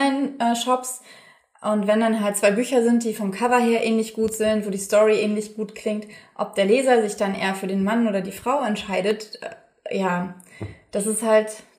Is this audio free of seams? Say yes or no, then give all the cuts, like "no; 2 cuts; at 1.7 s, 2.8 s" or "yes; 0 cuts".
yes; 0 cuts